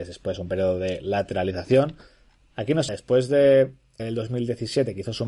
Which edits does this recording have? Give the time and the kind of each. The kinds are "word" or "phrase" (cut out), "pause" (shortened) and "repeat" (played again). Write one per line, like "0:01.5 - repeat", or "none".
0:02.9 - word
0:04.0 - word